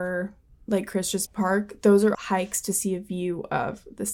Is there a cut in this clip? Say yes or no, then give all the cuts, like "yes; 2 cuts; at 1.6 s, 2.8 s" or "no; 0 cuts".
yes; 2 cuts; at 1.3 s, 2.1 s